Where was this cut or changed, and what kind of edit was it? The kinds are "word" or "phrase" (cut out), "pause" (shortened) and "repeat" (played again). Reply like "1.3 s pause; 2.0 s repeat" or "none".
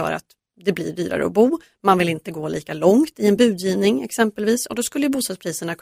none